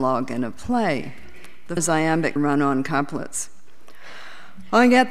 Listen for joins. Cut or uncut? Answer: cut